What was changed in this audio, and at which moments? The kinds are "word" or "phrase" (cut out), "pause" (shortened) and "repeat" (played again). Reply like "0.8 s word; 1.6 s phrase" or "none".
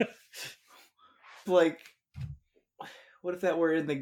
1.5 s phrase